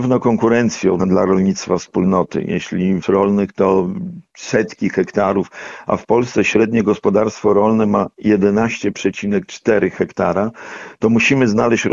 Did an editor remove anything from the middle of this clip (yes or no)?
yes